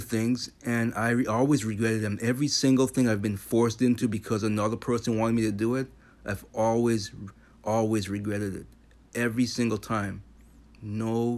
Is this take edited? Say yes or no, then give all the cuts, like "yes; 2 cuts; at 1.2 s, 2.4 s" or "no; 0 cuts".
no; 0 cuts